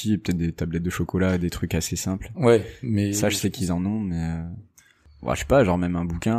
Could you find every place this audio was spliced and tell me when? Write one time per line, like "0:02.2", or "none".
none